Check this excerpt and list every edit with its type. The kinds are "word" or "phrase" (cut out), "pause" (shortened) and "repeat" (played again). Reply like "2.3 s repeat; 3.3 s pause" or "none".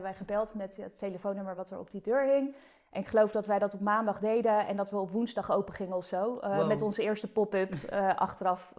none